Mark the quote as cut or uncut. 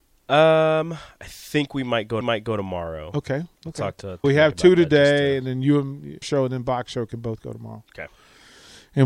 cut